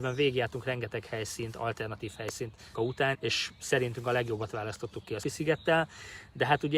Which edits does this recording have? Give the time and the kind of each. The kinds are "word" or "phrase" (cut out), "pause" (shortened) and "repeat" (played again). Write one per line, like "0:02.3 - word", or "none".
0:02.7 - word
0:03.1 - word
0:05.2 - word

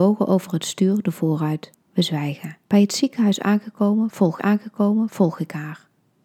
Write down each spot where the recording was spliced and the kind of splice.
0:01.0 - word
0:01.7 - pause
0:02.6 - pause
0:04.4 - repeat

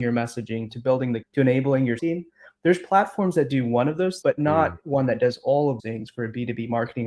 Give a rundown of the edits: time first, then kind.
0:01.2 - word
0:02.0 - word
0:04.2 - word
0:05.8 - word

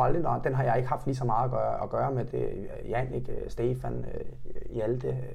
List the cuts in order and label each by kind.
0:02.3 - word

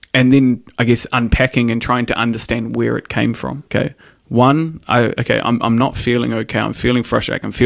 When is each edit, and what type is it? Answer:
0:03.7 - pause

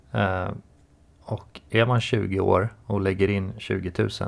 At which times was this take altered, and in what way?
none

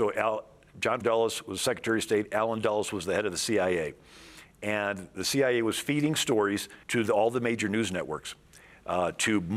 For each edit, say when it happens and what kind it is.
0:01.0 - word
0:06.8 - pause

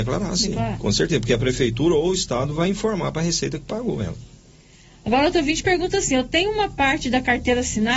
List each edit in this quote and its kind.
none

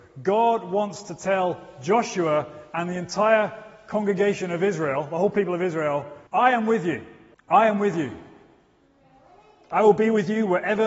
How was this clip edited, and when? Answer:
0:06.3 - pause
0:07.3 - pause

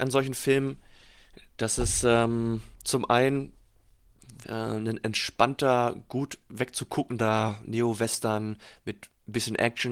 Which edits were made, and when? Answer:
0:02.7 - pause
0:04.4 - word

